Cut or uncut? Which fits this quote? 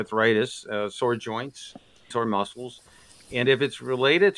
cut